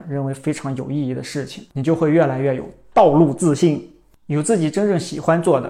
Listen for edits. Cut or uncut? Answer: uncut